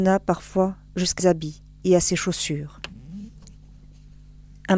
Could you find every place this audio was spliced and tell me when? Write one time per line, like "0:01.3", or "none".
0:01.2